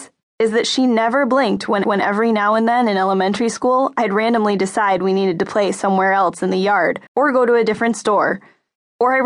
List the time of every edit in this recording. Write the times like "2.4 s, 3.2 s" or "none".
1.8 s, 7.1 s